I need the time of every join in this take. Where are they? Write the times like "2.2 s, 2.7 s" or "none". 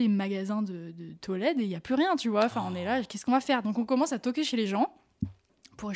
none